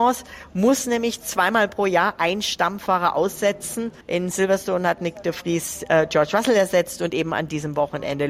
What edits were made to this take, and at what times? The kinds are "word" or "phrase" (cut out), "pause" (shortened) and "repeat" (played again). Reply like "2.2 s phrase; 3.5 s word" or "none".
4.0 s pause

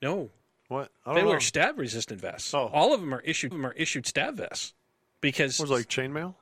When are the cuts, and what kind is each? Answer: 3.5 s repeat; 4.8 s pause

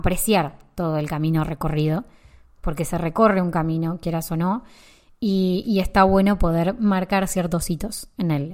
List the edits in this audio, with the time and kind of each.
none

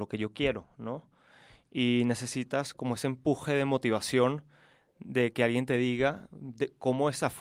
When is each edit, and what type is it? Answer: none

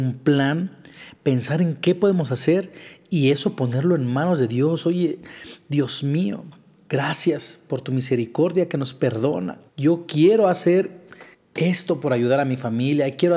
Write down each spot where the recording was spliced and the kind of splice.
9.7 s pause; 11.3 s pause

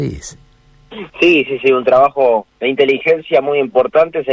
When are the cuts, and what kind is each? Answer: 1.5 s word; 2.5 s pause

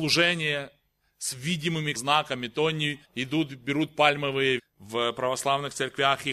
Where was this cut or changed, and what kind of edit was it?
1.9 s word; 3.0 s pause; 4.6 s phrase

